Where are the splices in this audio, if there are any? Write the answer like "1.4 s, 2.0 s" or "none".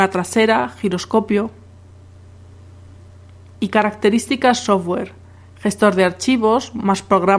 none

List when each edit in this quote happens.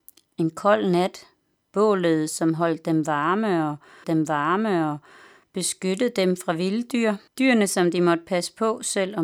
4.0 s, 7.3 s

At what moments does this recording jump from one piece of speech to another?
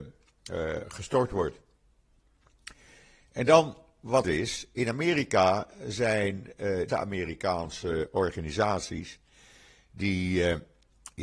4.2 s, 6.9 s

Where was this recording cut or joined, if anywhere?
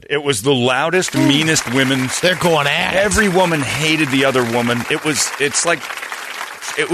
2.2 s

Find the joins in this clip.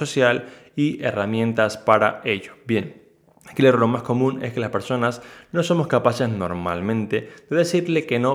none

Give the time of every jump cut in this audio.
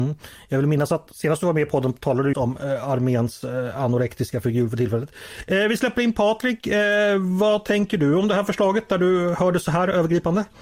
2.3 s

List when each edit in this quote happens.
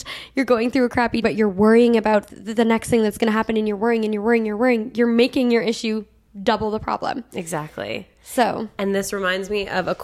1.2 s, 2.3 s

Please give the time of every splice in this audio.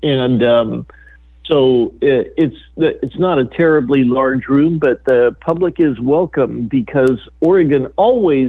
none

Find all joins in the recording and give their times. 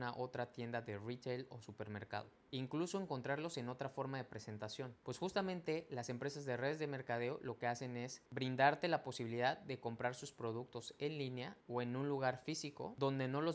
5.0 s, 8.3 s, 11.6 s

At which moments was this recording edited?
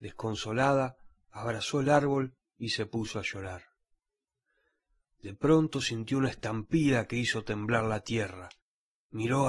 none

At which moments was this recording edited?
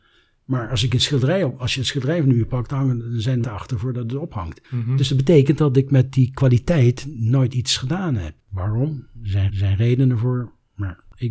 3.4 s, 4.6 s, 8.4 s, 9.5 s

